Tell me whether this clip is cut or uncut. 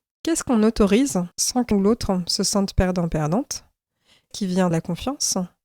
cut